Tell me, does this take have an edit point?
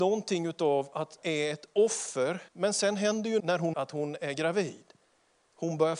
yes; 4 cuts; at 1.2 s, 2.5 s, 3.4 s, 3.7 s

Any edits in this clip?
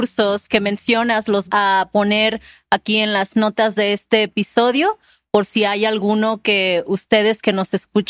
yes; 1 cut; at 1.5 s

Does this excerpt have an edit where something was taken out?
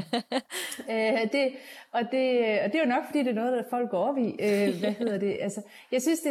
no; 0 cuts

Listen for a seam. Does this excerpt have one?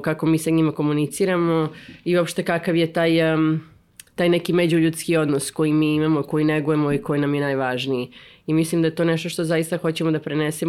no; 0 cuts

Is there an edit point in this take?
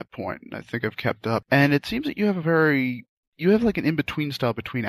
no; 0 cuts

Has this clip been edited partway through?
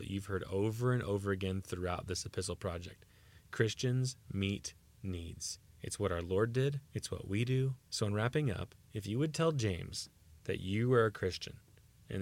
yes; 5 cuts; at 5.7 s, 6.9 s, 7.8 s, 8.8 s, 10.4 s

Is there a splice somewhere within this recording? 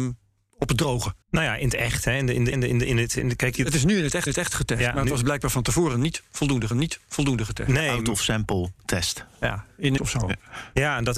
yes; 5 cuts; at 1.2 s, 2.5 s, 4.3 s, 6.7 s, 10.0 s

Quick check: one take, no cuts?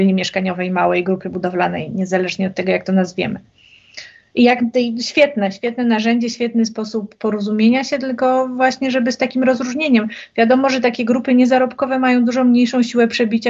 yes; 0 cuts

